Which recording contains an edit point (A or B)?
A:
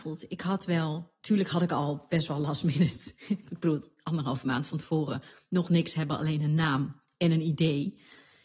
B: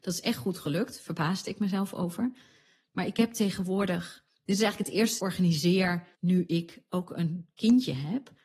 B